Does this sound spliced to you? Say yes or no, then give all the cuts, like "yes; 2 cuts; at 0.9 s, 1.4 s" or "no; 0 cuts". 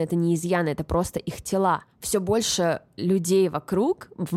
no; 0 cuts